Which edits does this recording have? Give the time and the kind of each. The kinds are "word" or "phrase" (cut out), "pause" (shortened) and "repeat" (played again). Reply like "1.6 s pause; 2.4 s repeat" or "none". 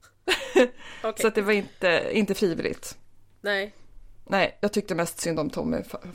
none